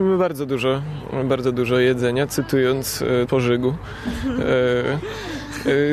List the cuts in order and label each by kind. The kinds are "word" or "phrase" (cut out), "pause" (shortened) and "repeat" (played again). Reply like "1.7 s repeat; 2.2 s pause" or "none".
3.3 s word